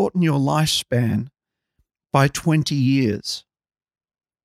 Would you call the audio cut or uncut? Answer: uncut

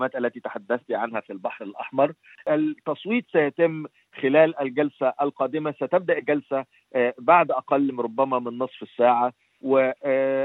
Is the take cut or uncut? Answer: uncut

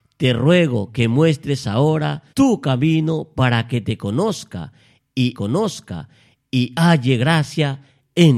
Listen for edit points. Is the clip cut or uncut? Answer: cut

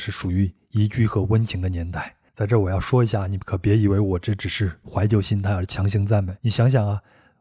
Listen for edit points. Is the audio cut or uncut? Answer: cut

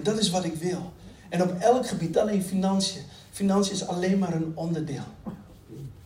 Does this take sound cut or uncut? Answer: cut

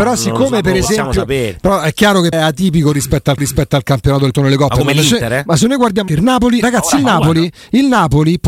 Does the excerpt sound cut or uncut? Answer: cut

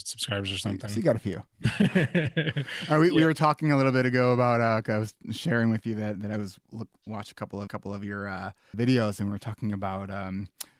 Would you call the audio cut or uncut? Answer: cut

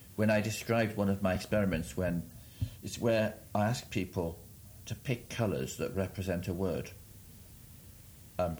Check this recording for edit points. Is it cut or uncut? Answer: uncut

